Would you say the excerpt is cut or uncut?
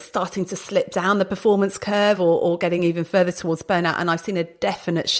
uncut